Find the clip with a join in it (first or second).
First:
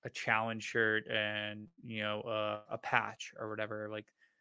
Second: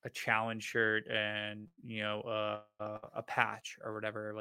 first